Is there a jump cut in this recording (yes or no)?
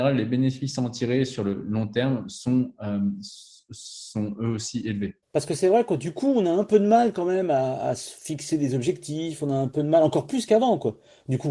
yes